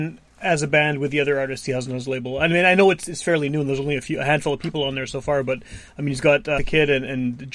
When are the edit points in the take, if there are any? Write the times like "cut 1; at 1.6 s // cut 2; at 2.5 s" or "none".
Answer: cut 1; at 6.6 s